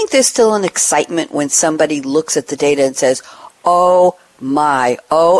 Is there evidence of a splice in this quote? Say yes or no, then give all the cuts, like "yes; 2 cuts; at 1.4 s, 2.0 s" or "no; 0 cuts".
no; 0 cuts